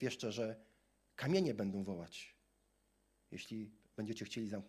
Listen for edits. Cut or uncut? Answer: uncut